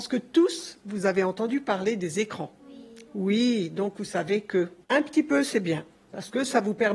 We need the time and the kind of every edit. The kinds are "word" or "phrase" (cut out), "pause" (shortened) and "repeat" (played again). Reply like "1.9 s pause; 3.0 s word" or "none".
2.6 s pause; 4.8 s pause